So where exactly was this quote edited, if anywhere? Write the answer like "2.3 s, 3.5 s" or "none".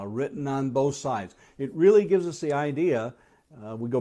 none